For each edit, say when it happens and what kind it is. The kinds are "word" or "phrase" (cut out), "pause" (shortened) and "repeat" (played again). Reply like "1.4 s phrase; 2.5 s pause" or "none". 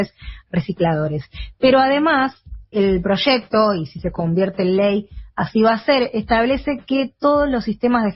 2.7 s word